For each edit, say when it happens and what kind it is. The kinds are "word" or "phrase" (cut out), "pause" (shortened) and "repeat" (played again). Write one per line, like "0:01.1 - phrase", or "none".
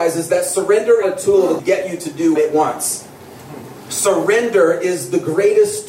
0:01.0 - phrase
0:01.6 - phrase
0:02.4 - word